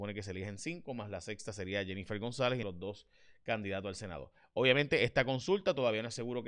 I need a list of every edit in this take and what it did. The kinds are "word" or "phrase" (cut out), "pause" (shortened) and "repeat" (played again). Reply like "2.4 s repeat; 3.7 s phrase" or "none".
2.6 s word